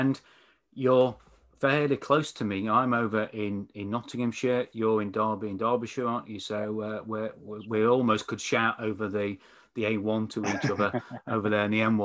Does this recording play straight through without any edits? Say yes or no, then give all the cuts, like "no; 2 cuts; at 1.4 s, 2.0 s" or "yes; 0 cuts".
yes; 0 cuts